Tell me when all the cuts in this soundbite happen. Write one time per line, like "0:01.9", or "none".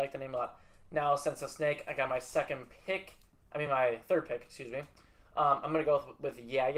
none

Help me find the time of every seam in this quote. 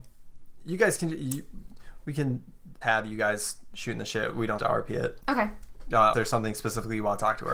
0:02.8
0:04.6
0:06.1

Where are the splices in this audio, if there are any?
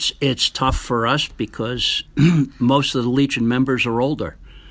0:02.0

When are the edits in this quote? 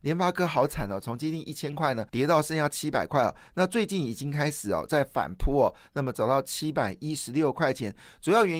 0:02.1

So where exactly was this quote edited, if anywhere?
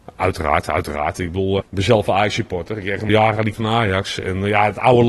0:01.6
0:03.1
0:03.5

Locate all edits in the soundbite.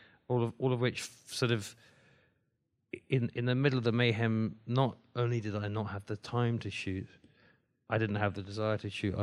none

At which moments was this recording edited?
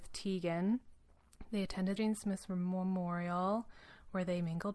0:02.0

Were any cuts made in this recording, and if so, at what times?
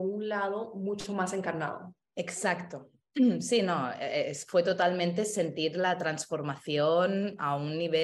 0:02.0

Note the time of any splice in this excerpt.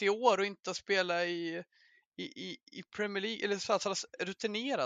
none

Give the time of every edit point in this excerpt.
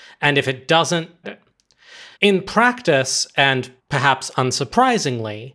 0:01.2
0:02.1
0:03.8

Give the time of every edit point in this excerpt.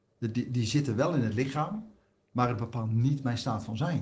none

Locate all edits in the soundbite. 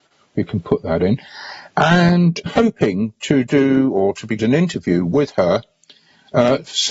0:02.5
0:04.4

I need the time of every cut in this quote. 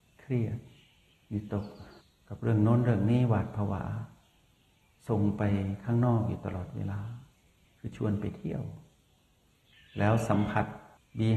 none

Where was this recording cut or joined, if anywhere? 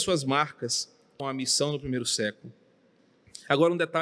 0:01.2

